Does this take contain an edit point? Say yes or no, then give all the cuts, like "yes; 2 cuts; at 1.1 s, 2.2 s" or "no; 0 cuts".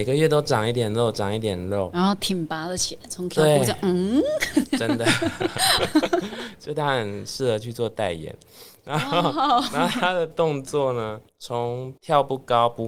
yes; 2 cuts; at 11.3 s, 12.0 s